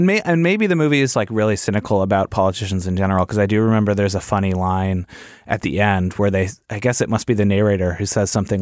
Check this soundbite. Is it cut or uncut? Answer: cut